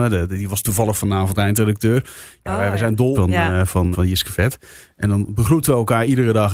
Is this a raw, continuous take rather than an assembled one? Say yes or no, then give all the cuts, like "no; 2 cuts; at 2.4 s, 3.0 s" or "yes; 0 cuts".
no; 2 cuts; at 3.1 s, 3.9 s